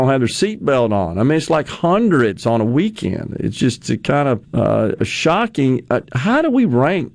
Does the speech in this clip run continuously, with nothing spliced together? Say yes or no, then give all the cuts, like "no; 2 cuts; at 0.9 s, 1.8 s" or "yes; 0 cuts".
no; 1 cut; at 4.4 s